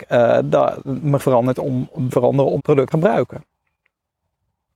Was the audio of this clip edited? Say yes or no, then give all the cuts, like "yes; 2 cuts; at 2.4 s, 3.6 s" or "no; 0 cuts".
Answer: yes; 4 cuts; at 1.2 s, 2.1 s, 2.6 s, 2.9 s